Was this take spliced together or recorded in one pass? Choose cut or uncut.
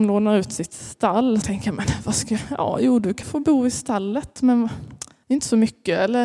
cut